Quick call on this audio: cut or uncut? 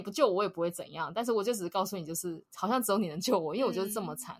uncut